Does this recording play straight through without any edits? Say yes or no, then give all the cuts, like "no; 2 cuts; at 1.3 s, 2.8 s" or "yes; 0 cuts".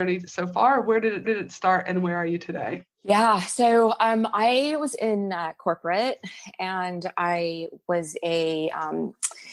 no; 2 cuts; at 1.2 s, 2.9 s